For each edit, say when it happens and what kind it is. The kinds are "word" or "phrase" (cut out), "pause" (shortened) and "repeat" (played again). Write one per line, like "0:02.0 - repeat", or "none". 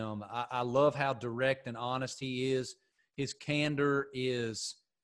none